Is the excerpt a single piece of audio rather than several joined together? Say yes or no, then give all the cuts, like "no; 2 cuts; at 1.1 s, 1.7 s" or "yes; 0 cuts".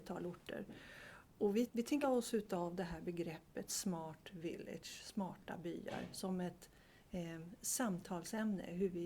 no; 2 cuts; at 1.7 s, 2.0 s